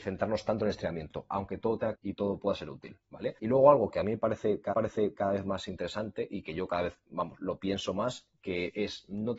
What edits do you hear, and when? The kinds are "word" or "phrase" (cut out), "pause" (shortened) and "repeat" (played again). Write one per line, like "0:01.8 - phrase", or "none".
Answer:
0:01.9 - word
0:03.4 - pause
0:04.7 - repeat